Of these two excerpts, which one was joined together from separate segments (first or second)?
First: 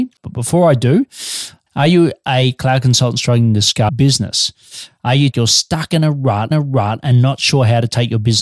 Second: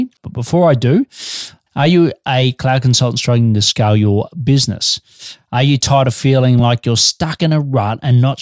first